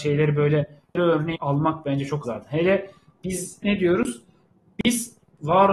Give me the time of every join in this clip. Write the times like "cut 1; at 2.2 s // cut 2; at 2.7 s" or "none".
cut 1; at 1.4 s // cut 2; at 2.2 s // cut 3; at 3.6 s